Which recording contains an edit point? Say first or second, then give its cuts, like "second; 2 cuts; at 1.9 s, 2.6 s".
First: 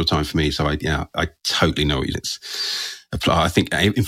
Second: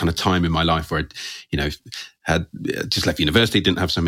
first; 1 cut; at 2.1 s